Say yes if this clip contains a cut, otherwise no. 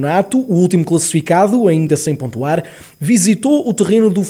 no